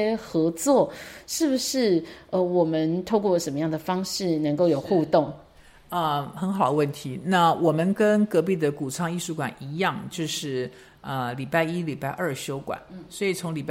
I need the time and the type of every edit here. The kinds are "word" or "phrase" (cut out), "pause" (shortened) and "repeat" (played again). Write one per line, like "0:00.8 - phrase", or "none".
none